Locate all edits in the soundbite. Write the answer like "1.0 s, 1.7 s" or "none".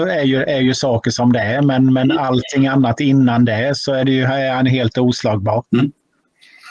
5.7 s

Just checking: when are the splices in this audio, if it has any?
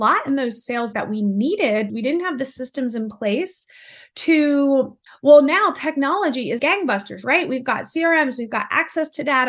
0.9 s, 1.9 s, 5.1 s, 6.6 s

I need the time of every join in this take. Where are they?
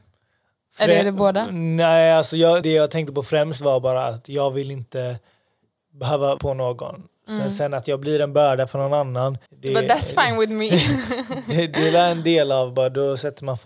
2.6 s, 6.4 s, 9.5 s

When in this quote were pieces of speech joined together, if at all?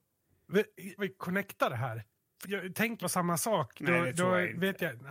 1.0 s, 2.4 s, 3.0 s

